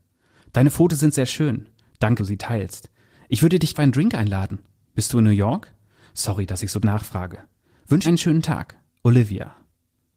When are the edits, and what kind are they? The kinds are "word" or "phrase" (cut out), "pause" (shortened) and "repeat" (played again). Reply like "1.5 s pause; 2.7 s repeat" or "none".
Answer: 2.2 s word; 3.7 s word; 6.8 s word; 8.0 s word